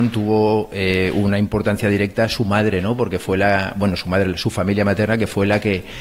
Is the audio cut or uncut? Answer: uncut